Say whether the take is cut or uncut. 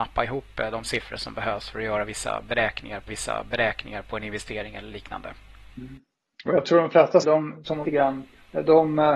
cut